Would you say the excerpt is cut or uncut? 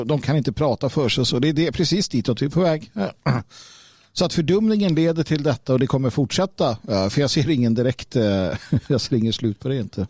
uncut